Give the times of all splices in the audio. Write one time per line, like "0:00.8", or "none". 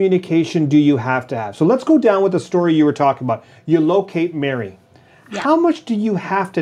none